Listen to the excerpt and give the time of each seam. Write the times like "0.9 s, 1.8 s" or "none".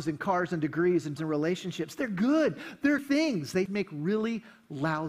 1.2 s, 3.0 s, 3.7 s